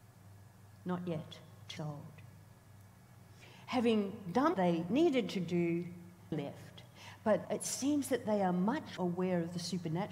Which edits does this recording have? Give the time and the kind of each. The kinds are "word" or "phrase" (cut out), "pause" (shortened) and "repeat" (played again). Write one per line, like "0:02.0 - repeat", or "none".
0:01.8 - word
0:04.5 - word
0:06.3 - word
0:07.4 - word
0:09.0 - word